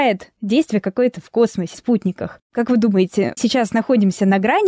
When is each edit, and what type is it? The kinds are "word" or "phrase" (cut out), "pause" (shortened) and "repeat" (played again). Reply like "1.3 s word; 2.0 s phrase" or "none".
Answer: 1.7 s word; 3.4 s word